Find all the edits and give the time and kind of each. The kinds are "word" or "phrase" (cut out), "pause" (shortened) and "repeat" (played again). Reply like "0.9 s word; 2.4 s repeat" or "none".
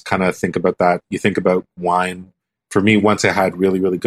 none

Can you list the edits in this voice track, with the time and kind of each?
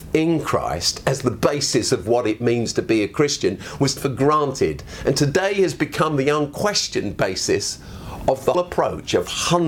4.0 s word; 8.5 s word

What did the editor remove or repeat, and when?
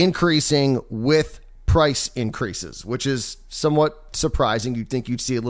none

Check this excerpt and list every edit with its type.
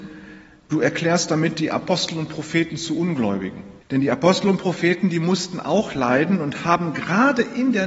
3.8 s pause

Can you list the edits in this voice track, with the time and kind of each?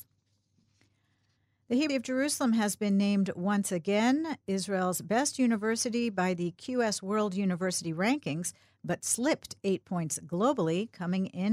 1.9 s word

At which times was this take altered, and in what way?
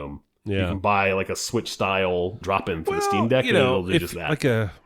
2.4 s word; 2.8 s word

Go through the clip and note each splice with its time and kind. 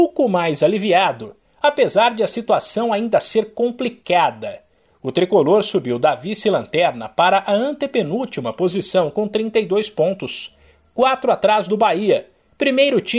none

